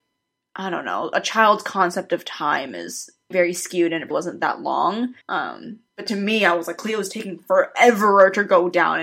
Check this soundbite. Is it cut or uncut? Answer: cut